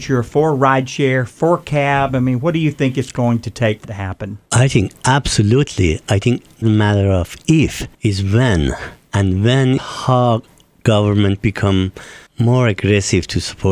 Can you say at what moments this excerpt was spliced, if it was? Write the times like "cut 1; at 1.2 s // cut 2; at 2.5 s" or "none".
cut 1; at 3.8 s // cut 2; at 4.5 s // cut 3; at 6.6 s // cut 4; at 7.9 s // cut 5; at 9.8 s // cut 6; at 12.3 s